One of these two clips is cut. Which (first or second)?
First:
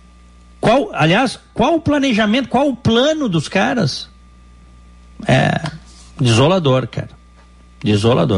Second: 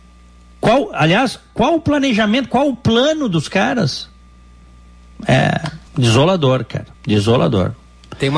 second